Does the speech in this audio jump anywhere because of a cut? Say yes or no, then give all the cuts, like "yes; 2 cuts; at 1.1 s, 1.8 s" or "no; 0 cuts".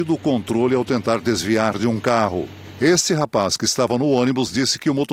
no; 0 cuts